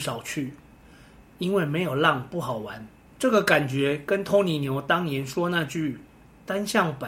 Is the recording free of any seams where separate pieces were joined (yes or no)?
no